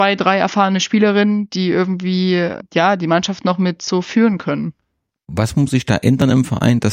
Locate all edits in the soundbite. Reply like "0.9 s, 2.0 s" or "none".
none